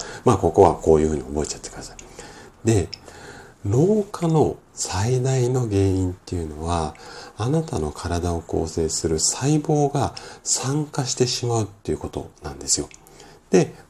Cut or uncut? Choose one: cut